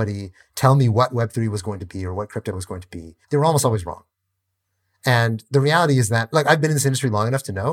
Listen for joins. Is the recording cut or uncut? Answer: cut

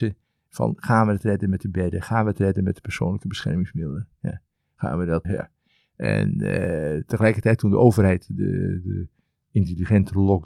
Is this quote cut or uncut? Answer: cut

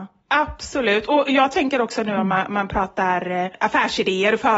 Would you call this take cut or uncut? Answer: uncut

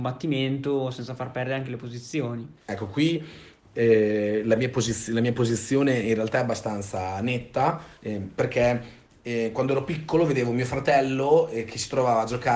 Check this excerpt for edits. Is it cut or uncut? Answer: cut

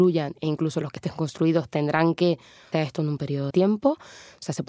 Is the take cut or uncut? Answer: cut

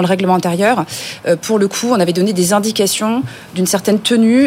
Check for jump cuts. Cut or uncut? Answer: uncut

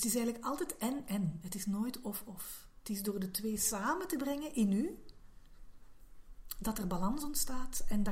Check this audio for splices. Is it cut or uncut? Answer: uncut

